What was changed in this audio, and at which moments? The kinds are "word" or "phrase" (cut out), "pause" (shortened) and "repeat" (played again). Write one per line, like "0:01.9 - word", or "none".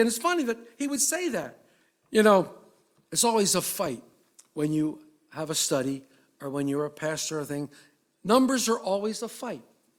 none